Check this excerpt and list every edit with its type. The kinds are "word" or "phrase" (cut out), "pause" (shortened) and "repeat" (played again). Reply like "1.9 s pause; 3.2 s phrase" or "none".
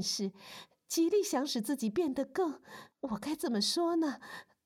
2.9 s pause